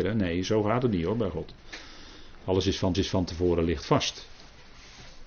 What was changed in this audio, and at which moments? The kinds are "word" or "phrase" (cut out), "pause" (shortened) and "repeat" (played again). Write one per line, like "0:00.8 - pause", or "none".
0:02.9 - repeat